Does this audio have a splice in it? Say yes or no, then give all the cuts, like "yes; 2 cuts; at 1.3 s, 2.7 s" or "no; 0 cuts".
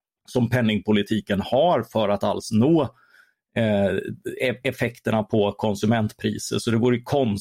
no; 0 cuts